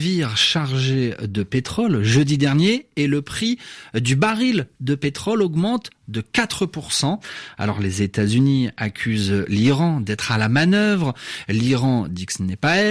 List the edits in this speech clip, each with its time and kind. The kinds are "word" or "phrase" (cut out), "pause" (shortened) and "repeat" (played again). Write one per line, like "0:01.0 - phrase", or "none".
none